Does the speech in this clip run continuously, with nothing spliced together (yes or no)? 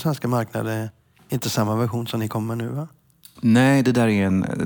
yes